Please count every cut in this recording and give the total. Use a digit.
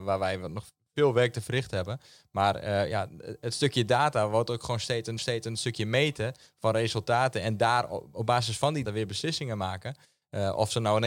2